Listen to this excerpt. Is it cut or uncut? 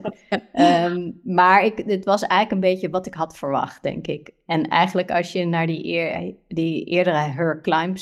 uncut